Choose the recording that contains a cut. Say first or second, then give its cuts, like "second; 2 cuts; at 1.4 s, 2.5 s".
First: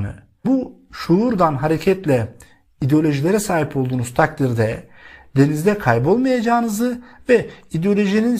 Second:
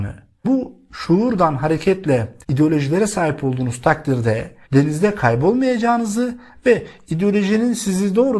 second; 2 cuts; at 2.4 s, 4.6 s